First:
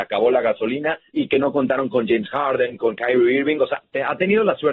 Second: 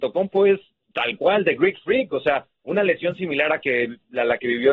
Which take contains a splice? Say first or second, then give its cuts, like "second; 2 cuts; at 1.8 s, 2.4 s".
first; 1 cut; at 1.1 s